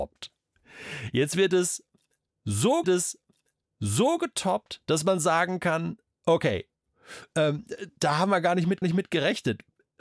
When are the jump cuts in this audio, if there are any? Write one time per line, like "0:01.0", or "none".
0:02.8
0:08.8